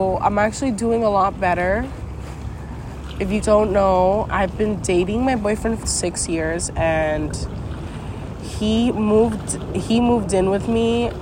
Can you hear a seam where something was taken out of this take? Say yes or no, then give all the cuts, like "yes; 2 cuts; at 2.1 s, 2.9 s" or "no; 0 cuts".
yes; 3 cuts; at 3.4 s, 4.3 s, 5.8 s